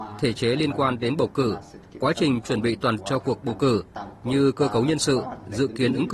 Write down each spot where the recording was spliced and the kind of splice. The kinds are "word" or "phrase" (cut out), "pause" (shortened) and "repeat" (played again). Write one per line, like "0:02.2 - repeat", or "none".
0:03.0 - word